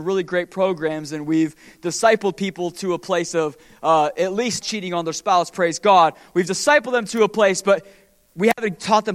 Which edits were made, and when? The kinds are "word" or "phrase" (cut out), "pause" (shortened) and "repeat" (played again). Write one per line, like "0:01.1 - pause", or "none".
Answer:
0:04.6 - word